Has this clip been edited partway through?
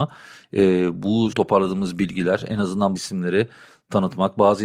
yes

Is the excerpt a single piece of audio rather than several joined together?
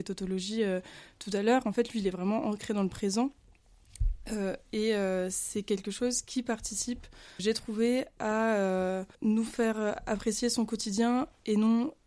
no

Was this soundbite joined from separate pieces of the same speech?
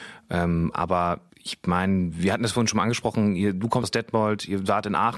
yes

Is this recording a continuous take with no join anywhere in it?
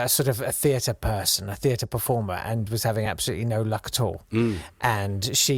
yes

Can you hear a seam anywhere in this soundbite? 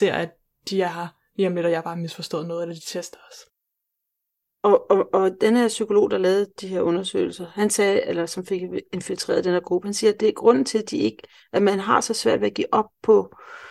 no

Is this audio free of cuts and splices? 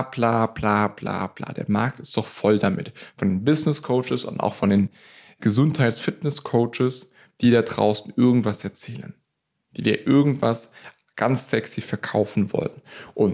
yes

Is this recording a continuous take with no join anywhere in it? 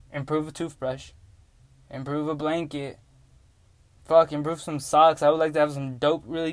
yes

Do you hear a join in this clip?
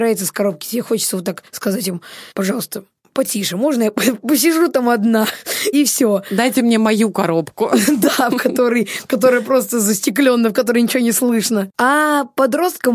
yes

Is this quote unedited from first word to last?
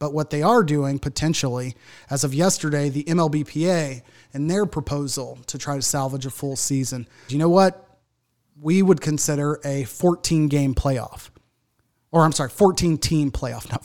no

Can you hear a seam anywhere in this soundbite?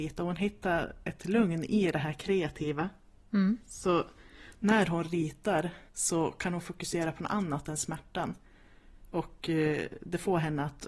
yes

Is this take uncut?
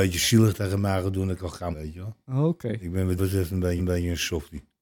no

